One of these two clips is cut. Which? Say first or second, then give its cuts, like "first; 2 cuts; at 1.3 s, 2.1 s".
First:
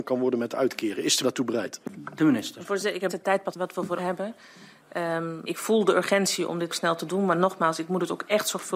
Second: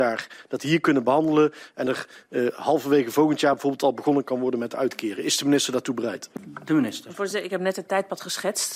first; 6 cuts; at 1.2 s, 3.1 s, 3.5 s, 4.0 s, 5.5 s, 6.7 s